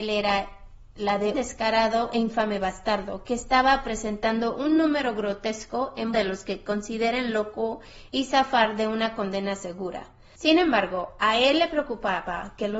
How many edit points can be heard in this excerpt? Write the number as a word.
two